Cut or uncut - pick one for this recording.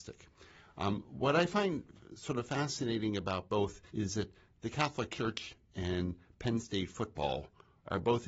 cut